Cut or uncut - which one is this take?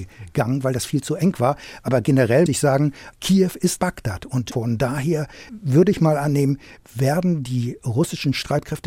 cut